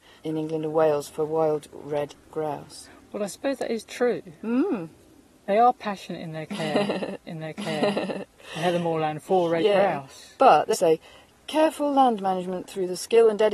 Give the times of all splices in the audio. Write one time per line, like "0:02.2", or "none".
0:07.3
0:10.7